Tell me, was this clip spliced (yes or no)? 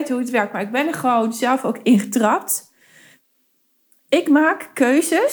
no